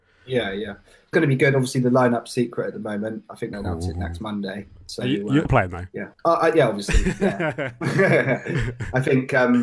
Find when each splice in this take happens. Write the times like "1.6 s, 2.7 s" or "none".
1.1 s, 3.5 s, 5.5 s, 6.1 s